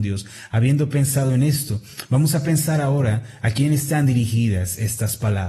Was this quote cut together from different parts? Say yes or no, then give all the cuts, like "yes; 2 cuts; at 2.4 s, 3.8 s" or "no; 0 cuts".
no; 0 cuts